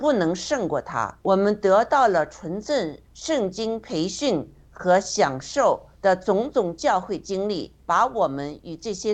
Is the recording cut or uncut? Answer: cut